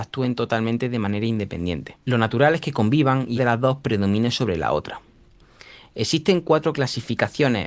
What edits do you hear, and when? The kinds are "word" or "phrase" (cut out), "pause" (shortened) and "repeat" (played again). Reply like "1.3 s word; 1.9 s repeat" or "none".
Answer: 2.0 s pause; 3.4 s word